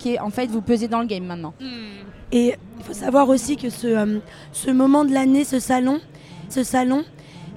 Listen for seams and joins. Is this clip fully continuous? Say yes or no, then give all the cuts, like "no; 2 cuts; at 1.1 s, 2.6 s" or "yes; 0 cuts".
no; 1 cut; at 6.5 s